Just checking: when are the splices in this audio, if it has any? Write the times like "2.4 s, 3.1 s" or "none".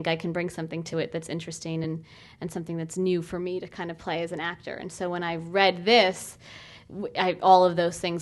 none